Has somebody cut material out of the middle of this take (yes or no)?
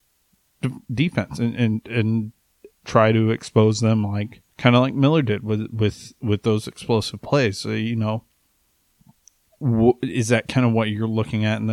yes